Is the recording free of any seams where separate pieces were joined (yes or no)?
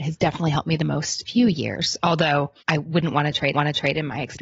no